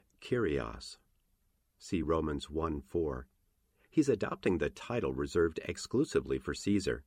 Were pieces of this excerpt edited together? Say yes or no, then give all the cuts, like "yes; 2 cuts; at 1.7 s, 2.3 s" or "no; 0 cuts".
no; 0 cuts